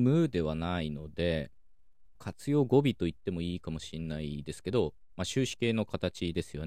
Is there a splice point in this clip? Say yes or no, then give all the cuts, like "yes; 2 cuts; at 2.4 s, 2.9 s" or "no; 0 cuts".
yes; 1 cut; at 2.2 s